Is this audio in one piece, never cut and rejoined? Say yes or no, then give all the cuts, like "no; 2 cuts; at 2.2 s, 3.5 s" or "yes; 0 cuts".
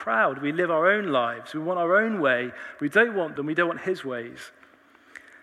no; 1 cut; at 3.4 s